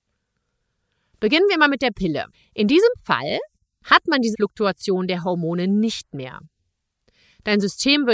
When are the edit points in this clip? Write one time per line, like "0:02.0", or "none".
0:02.3
0:04.3